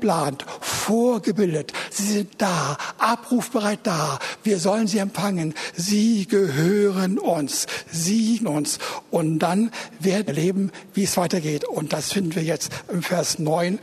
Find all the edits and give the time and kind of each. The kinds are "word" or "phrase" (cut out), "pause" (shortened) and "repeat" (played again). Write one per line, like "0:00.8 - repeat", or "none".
0:08.4 - word
0:10.3 - word